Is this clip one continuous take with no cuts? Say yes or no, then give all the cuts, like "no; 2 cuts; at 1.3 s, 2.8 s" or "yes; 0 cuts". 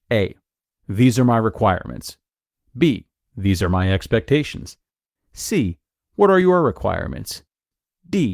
yes; 0 cuts